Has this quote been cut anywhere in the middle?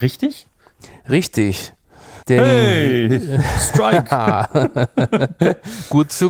yes; 1 cut; at 2.2 s

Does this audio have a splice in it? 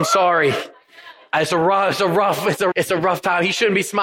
yes; 1 cut; at 2.7 s

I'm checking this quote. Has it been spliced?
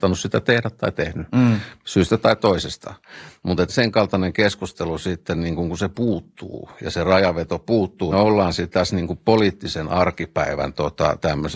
yes; 2 cuts; at 3.7 s, 8.1 s

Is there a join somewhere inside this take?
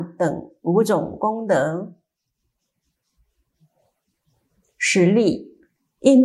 no; 0 cuts

